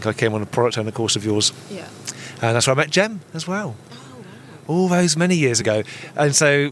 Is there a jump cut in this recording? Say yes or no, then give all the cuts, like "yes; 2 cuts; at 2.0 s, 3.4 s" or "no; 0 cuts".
no; 0 cuts